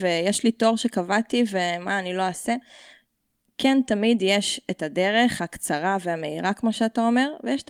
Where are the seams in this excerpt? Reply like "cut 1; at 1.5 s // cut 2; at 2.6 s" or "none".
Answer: none